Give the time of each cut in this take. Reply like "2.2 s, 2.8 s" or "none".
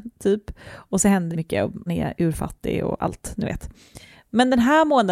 1.3 s, 1.9 s